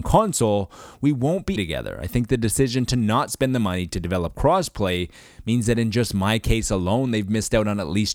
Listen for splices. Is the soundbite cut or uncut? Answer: cut